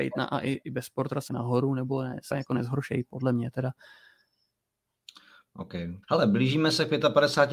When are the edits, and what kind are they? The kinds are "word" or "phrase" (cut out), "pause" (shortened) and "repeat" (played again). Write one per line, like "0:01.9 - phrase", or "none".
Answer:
0:01.3 - phrase
0:02.3 - word
0:06.0 - pause